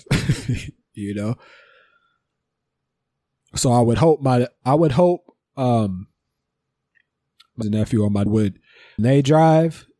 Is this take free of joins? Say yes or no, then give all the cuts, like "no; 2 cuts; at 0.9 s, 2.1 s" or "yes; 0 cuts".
no; 3 cuts; at 7.6 s, 8.3 s, 9.0 s